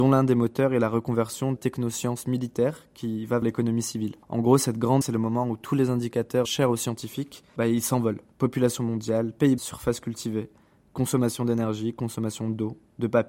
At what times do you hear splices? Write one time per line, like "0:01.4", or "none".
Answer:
0:01.6
0:03.4
0:04.2
0:05.0
0:06.4
0:07.5
0:08.3
0:09.6